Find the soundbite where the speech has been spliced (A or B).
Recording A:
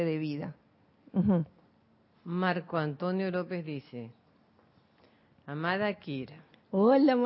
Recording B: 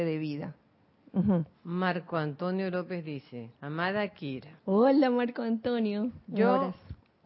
B